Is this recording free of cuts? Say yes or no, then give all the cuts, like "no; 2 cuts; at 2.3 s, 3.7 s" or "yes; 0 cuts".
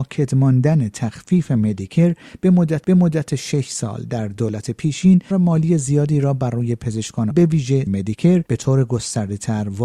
no; 5 cuts; at 2.8 s, 5.3 s, 7.3 s, 7.9 s, 8.5 s